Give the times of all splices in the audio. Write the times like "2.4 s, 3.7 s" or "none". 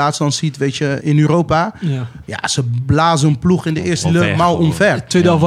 1.0 s, 4.0 s